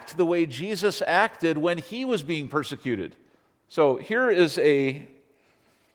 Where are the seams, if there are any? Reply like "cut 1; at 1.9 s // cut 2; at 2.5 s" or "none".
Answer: cut 1; at 3.4 s